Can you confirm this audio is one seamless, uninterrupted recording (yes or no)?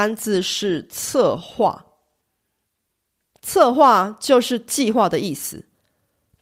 yes